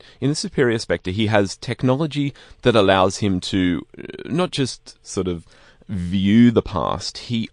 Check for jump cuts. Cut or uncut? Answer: uncut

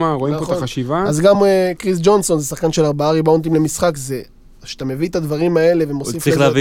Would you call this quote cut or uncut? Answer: uncut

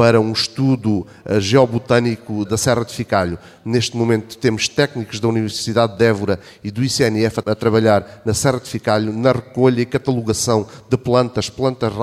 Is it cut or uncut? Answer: cut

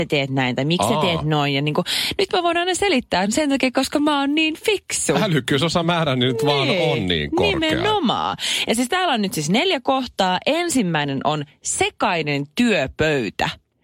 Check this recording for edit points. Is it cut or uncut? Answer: uncut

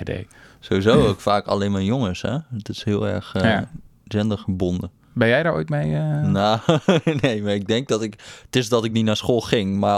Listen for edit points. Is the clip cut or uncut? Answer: uncut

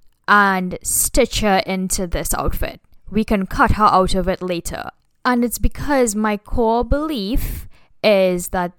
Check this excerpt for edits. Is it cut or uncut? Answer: uncut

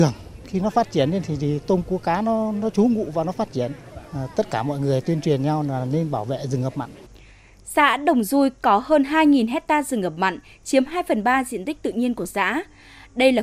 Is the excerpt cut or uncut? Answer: uncut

